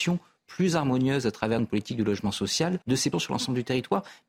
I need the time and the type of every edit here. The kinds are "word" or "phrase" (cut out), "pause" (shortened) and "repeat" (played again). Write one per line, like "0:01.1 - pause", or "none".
0:01.6 - word
0:02.8 - pause
0:03.1 - word